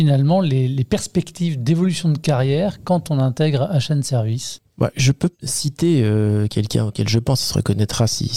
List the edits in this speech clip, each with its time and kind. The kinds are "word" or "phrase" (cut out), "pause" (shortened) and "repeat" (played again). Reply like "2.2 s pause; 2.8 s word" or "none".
5.3 s pause